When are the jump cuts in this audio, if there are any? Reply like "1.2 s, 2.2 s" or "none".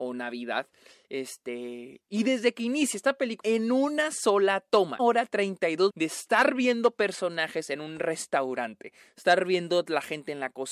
3.4 s, 5.0 s, 5.9 s